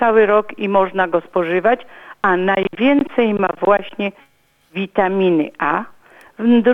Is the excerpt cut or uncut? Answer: uncut